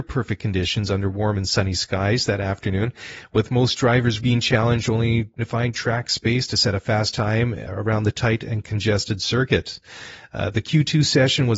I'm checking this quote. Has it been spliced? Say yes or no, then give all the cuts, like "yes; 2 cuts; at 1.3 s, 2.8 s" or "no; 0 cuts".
yes; 2 cuts; at 4.2 s, 5.4 s